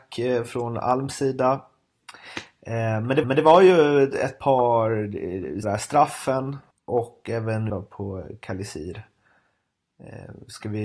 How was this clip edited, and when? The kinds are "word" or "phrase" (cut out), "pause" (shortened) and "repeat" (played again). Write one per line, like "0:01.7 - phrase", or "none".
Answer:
0:03.2 - repeat
0:05.6 - word
0:06.7 - pause
0:07.7 - word